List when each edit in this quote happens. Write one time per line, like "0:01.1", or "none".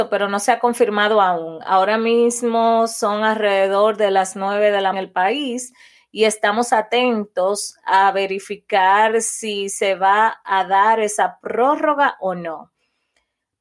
0:04.9